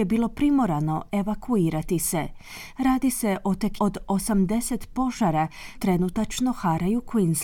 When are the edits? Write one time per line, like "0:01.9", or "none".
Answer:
0:03.8
0:05.7